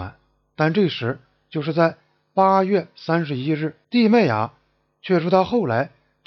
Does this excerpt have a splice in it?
yes; 1 cut; at 3.8 s

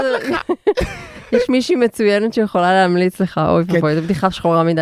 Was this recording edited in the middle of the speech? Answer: no; 0 cuts

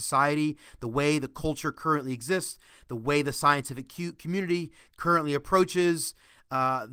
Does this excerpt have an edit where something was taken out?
no; 0 cuts

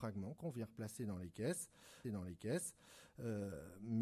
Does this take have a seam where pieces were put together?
yes; 1 cut; at 2.0 s

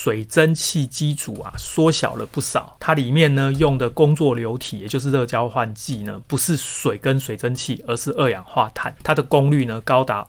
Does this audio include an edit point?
yes; 1 cut; at 9.0 s

